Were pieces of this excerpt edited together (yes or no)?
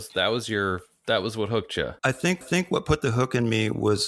yes